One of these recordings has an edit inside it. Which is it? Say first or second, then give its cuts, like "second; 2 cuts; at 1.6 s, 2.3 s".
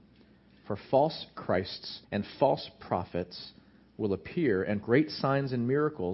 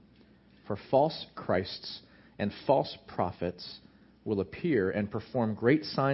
first; 2 cuts; at 2.0 s, 4.8 s